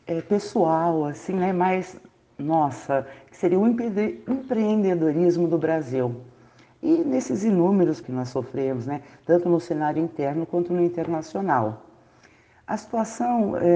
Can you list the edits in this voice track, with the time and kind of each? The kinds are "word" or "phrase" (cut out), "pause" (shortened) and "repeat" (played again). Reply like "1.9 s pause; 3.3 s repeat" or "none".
8.0 s phrase